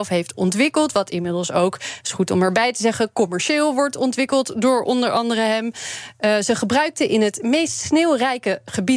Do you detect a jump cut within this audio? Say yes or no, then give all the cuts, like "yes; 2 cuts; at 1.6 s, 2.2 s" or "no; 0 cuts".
no; 0 cuts